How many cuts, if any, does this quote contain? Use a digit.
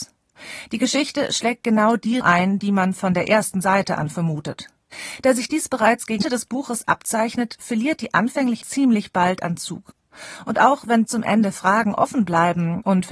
4